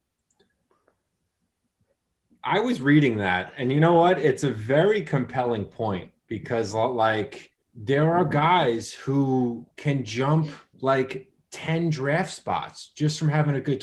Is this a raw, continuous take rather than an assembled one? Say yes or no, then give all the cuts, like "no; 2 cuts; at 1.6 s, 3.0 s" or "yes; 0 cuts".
no; 3 cuts; at 7.6 s, 9.7 s, 10.7 s